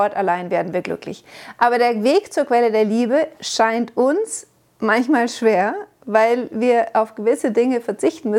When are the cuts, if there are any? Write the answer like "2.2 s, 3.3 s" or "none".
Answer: none